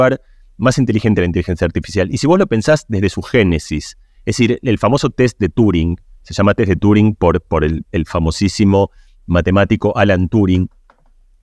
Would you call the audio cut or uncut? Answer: uncut